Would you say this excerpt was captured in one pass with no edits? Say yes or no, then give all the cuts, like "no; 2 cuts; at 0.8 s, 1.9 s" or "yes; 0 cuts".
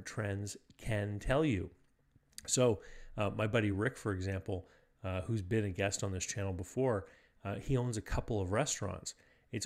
yes; 0 cuts